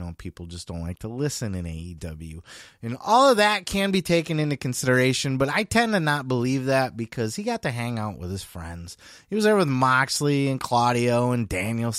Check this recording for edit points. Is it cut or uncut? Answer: uncut